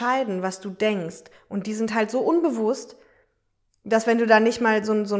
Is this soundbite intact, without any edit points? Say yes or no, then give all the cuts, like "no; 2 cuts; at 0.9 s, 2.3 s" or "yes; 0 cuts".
yes; 0 cuts